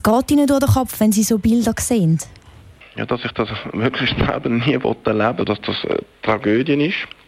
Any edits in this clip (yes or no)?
yes